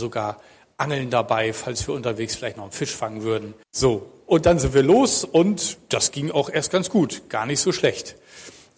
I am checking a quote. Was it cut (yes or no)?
yes